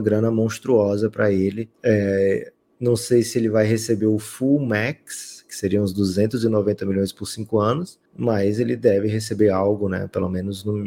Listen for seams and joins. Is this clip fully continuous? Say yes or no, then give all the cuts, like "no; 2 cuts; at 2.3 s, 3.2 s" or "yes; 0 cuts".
no; 2 cuts; at 1.7 s, 8.1 s